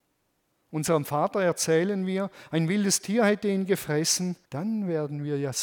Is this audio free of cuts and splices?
no; 1 cut; at 4.4 s

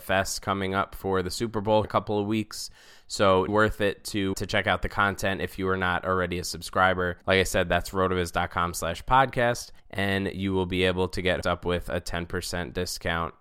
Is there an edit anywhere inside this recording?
yes; 6 cuts; at 1.8 s, 3.5 s, 4.3 s, 7.2 s, 9.8 s, 11.4 s

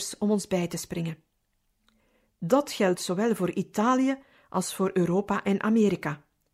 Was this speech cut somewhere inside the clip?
no; 0 cuts

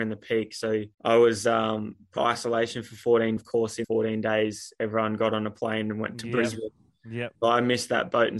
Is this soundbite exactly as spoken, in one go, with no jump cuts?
no; 5 cuts; at 0.9 s, 2.2 s, 3.4 s, 3.8 s, 7.4 s

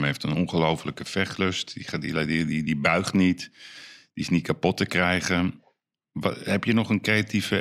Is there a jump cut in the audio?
no; 0 cuts

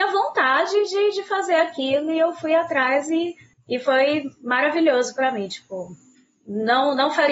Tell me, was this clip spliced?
yes; 1 cut; at 3.5 s

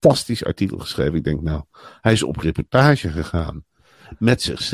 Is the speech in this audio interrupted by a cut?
no; 0 cuts

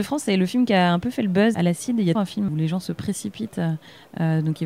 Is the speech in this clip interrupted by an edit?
yes; 3 cuts; at 1.5 s, 2.2 s, 2.5 s

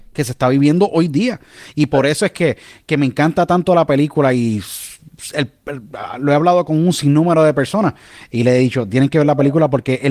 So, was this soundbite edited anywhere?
no; 0 cuts

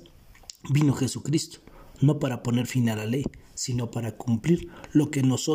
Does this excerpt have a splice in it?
no; 0 cuts

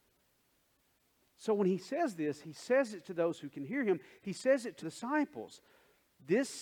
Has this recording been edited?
yes; 1 cut; at 4.8 s

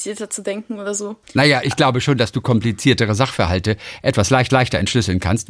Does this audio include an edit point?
yes; 2 cuts; at 1.2 s, 4.5 s

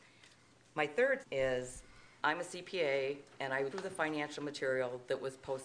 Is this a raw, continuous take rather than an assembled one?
no; 3 cuts; at 1.2 s, 2.2 s, 3.7 s

